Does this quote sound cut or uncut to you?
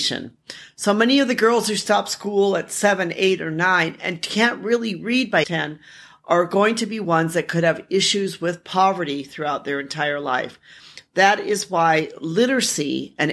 cut